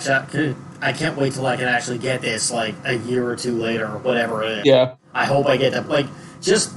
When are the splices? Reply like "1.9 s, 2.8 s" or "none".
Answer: none